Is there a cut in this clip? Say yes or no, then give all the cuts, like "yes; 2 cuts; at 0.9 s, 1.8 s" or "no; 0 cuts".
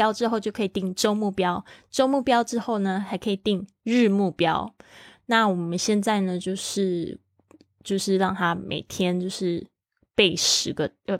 no; 0 cuts